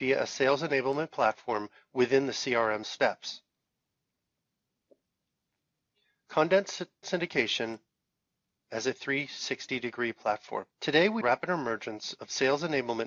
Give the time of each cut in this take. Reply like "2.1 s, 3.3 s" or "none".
2.8 s, 7.0 s, 10.7 s, 11.2 s